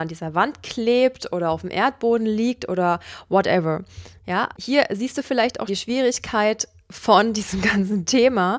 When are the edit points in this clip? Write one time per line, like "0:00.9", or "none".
0:04.5
0:05.7